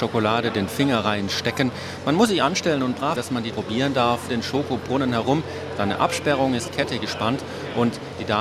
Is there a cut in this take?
yes; 4 cuts; at 3.2 s, 3.5 s, 4.3 s, 6.7 s

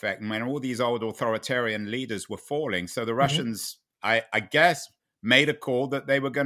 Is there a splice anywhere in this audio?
no; 0 cuts

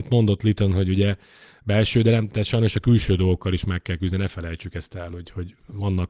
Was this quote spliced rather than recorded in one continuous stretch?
no; 0 cuts

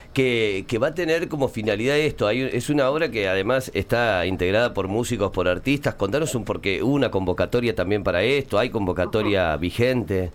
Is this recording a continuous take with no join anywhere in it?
no; 1 cut; at 6.4 s

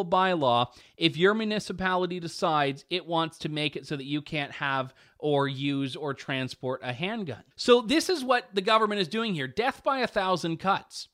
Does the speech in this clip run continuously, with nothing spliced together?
no; 1 cut; at 7.5 s

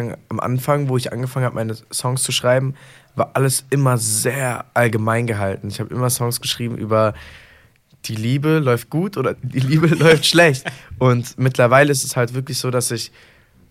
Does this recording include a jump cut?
no; 0 cuts

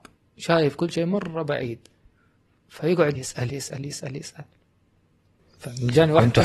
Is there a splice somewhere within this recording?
yes; 2 cuts; at 3.2 s, 3.5 s

